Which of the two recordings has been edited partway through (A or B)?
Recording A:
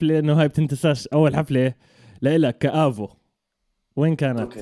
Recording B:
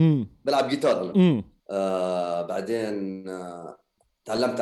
B